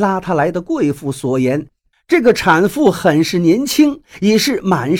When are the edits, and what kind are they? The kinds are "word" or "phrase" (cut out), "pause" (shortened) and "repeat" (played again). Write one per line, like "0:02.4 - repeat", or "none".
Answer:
none